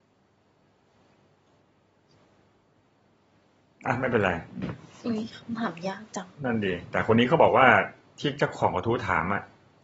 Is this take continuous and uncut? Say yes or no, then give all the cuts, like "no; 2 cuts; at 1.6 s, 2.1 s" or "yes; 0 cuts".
yes; 0 cuts